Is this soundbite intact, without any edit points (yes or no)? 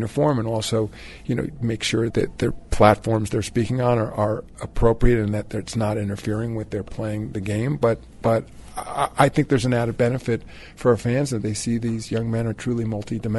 no